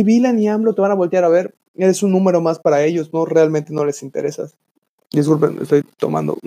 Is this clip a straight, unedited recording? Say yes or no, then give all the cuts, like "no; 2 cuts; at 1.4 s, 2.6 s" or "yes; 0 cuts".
yes; 0 cuts